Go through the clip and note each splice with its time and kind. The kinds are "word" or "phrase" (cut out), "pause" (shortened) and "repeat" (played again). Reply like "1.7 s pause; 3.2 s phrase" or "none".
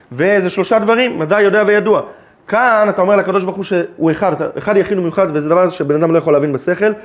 none